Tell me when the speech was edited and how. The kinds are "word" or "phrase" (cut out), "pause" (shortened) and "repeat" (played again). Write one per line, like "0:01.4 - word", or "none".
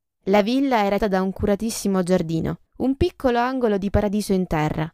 0:01.0 - word
0:02.7 - pause